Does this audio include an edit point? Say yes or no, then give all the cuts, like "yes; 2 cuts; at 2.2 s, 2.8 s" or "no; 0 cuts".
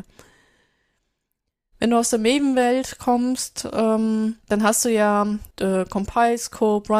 yes; 2 cuts; at 4.4 s, 5.5 s